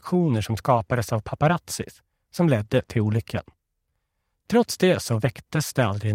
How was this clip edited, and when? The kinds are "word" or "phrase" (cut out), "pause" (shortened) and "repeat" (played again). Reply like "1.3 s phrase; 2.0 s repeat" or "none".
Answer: none